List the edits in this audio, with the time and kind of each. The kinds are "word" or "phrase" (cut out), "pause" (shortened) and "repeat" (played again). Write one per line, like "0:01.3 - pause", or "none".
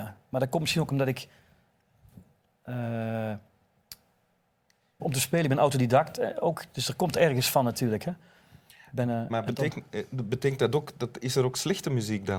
0:05.0 - phrase
0:09.3 - word

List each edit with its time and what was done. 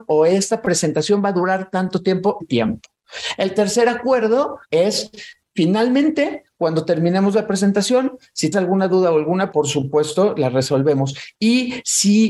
0:02.4 - phrase
0:04.6 - pause
0:08.5 - word
0:09.5 - word

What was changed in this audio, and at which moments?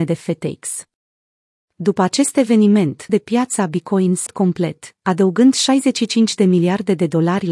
0:03.1 - word
0:04.3 - word

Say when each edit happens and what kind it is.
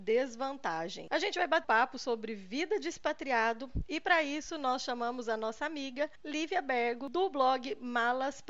0:01.6 - word
0:06.2 - pause

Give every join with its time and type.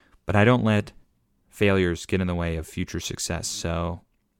none

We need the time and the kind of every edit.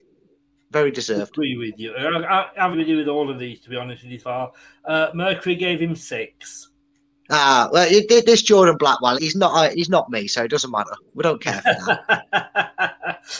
0:02.7 - word
0:04.2 - word
0:09.2 - word
0:09.7 - word

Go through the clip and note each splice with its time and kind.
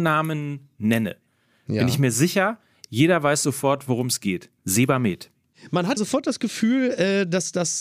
0:04.6 - pause
0:06.0 - word

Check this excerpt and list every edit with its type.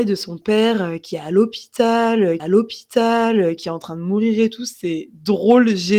0:02.4 - repeat

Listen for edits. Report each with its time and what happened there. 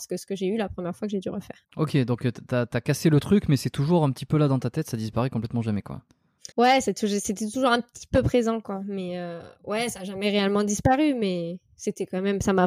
0:01.6 - pause
0:06.5 - pause
0:09.5 - pause

